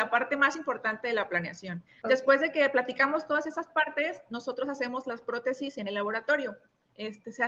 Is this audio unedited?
no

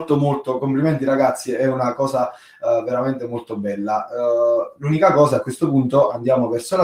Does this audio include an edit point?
no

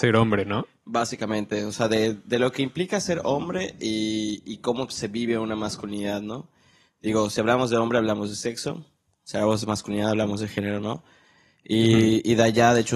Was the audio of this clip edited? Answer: no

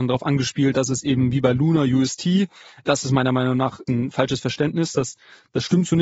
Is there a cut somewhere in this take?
no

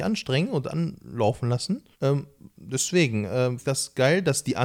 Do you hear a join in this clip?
yes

